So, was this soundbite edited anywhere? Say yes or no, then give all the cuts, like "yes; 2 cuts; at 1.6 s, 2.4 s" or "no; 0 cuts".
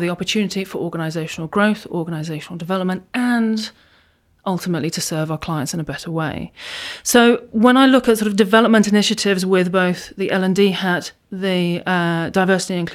no; 0 cuts